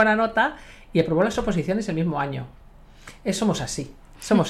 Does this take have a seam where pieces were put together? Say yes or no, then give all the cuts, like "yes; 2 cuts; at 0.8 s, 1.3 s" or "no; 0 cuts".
no; 0 cuts